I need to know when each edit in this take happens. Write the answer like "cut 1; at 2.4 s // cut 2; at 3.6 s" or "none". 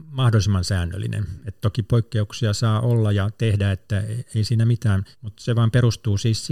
cut 1; at 5.1 s

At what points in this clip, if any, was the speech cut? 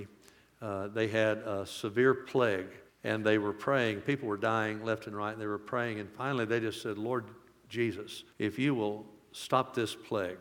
cut 1; at 2.9 s // cut 2; at 8.3 s

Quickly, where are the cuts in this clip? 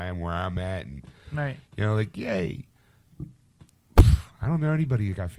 cut 1; at 3.7 s

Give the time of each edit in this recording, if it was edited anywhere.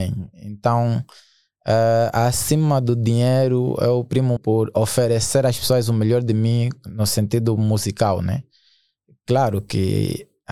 cut 1; at 4.4 s

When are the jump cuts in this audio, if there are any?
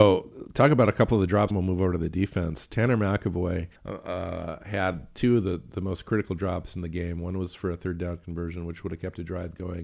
cut 1; at 1.5 s // cut 2; at 3.8 s

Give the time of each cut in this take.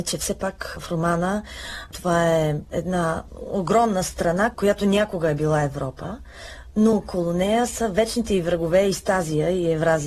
none

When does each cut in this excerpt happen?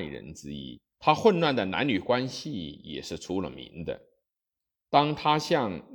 cut 1; at 0.9 s

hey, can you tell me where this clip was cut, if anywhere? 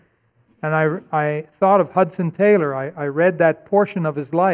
none

